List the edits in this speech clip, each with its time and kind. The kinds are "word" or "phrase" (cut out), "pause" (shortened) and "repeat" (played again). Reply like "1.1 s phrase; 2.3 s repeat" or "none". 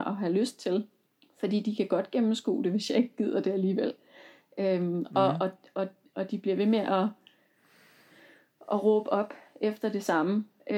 1.1 s pause